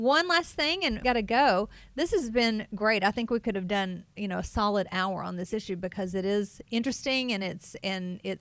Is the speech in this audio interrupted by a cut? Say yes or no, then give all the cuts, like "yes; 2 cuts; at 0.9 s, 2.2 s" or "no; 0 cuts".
yes; 1 cut; at 1.0 s